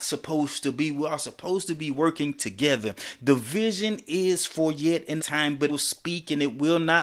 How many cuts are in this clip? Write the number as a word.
two